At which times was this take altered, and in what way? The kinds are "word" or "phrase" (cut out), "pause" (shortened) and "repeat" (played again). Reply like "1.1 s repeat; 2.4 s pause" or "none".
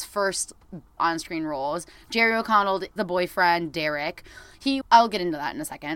1.0 s word; 3.0 s word; 4.8 s word